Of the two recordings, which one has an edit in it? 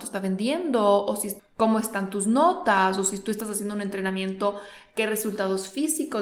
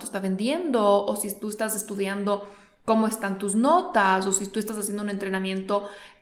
first; 1 cut; at 1.4 s

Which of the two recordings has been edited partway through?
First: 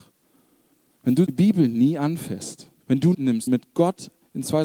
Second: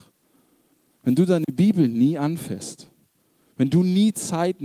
first; 4 cuts; at 1.3 s, 2.8 s, 3.1 s, 3.5 s

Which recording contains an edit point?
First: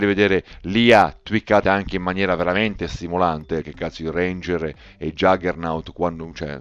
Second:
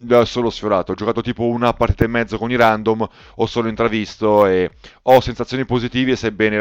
first; 2 cuts; at 1.6 s, 3.6 s

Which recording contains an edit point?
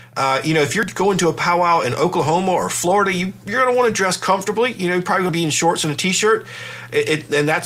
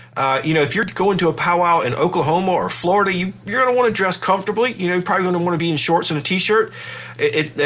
first; 1 cut; at 5.3 s

